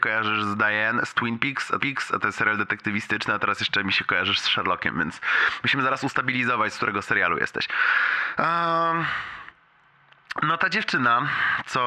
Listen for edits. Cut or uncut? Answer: cut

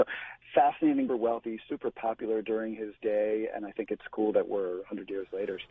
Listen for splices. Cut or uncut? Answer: cut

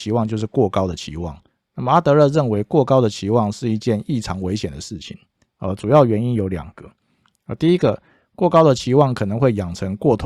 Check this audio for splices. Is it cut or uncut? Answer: uncut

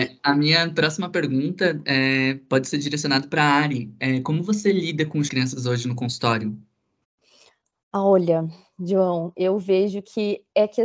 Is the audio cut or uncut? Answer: cut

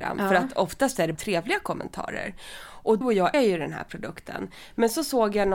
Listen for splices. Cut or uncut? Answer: cut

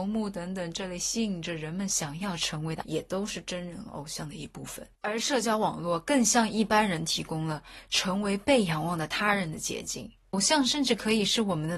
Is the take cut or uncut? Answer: cut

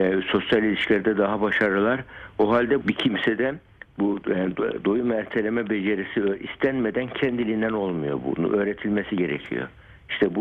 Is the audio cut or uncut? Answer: cut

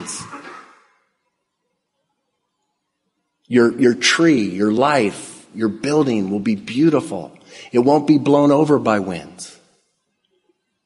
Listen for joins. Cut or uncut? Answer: uncut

